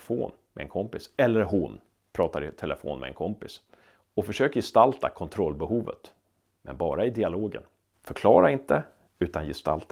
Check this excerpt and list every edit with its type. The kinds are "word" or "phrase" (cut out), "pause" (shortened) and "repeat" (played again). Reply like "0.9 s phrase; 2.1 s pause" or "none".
none